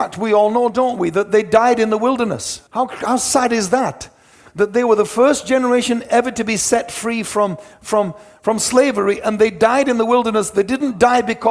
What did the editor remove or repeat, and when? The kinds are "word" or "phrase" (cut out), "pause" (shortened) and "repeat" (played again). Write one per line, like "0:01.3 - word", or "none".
0:02.7 - pause